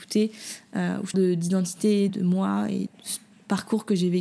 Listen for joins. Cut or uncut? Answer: cut